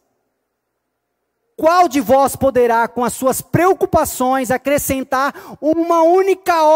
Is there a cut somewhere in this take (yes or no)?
no